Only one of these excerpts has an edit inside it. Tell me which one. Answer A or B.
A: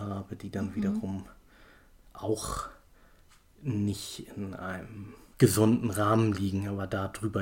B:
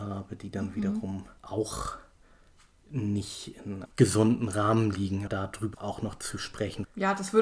B